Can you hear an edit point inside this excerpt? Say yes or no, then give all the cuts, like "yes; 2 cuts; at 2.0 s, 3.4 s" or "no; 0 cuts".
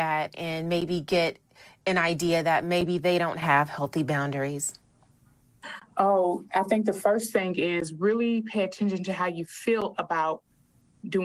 no; 0 cuts